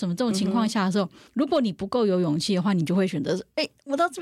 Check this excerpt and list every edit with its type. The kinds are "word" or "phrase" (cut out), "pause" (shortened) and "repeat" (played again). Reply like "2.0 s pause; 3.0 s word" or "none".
1.3 s pause